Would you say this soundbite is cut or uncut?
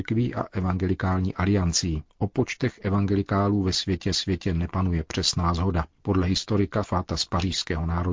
cut